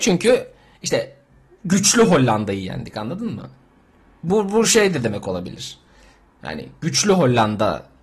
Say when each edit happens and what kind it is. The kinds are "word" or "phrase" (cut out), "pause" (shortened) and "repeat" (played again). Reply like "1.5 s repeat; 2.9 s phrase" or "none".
none

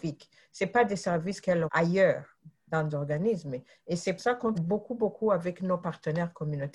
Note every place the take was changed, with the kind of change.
1.7 s word; 2.9 s word; 4.2 s word; 4.5 s word

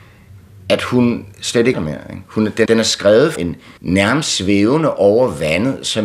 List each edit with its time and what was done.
1.7 s word; 2.7 s word; 3.4 s word; 3.8 s pause

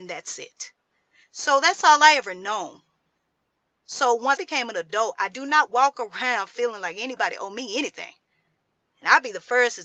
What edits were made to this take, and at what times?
4.4 s word

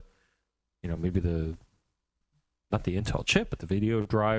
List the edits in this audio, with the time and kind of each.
none

